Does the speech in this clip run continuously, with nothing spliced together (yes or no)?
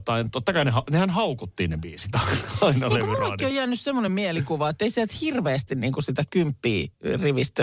yes